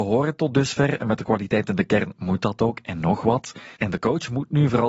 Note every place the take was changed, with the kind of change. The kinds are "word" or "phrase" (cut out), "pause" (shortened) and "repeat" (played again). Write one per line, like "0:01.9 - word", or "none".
0:03.8 - pause